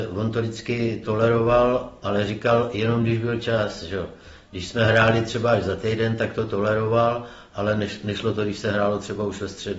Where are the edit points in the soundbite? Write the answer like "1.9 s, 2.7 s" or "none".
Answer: none